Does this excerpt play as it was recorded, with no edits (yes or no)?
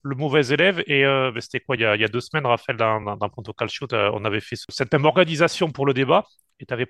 yes